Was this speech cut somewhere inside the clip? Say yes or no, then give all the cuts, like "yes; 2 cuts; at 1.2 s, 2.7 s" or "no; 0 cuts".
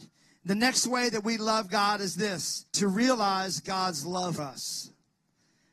yes; 2 cuts; at 2.7 s, 4.4 s